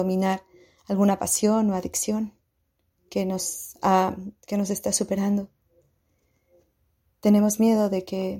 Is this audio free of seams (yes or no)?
yes